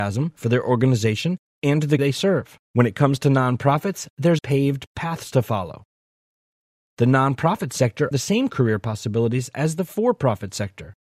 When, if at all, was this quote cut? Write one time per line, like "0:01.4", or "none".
0:02.0
0:02.6
0:04.4
0:08.1